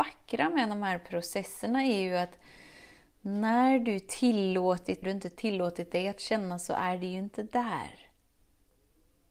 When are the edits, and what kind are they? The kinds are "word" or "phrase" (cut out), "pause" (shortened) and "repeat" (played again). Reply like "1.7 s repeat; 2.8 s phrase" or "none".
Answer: 5.0 s phrase